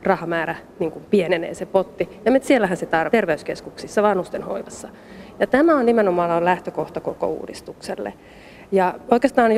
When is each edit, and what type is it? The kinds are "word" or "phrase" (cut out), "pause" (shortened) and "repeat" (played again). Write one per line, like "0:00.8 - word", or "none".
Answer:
0:02.4 - phrase
0:03.1 - word